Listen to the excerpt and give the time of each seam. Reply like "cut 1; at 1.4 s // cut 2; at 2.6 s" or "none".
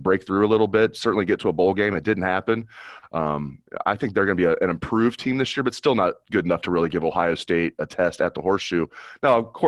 none